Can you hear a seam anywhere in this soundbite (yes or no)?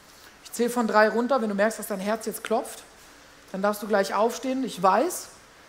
no